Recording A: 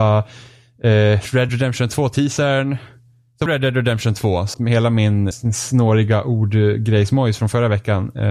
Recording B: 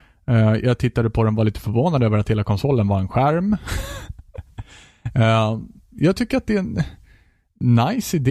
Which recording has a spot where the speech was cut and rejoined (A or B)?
A